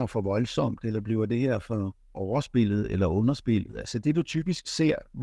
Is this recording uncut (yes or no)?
yes